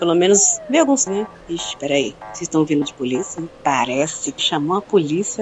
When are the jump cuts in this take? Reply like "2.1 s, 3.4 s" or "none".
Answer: 1.1 s, 2.8 s, 4.4 s